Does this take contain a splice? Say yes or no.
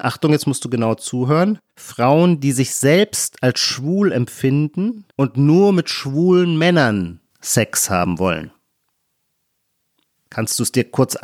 yes